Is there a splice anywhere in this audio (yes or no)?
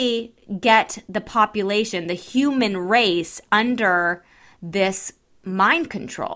no